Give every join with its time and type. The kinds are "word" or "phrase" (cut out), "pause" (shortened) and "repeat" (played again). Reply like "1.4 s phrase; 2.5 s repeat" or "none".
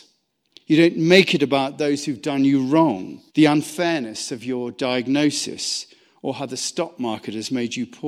3.3 s pause